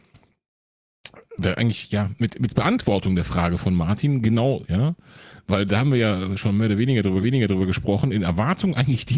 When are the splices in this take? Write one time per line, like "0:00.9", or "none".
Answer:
0:04.6
0:07.2